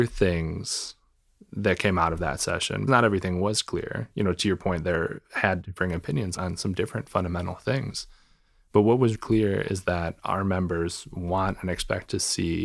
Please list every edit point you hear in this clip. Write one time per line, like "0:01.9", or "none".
0:02.9
0:05.2
0:06.4
0:09.1